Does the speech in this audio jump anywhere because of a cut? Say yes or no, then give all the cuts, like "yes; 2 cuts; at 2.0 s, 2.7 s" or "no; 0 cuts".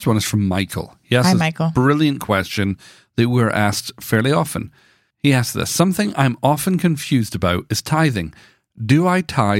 no; 0 cuts